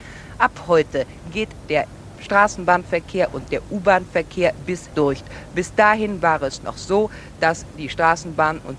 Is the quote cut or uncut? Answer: cut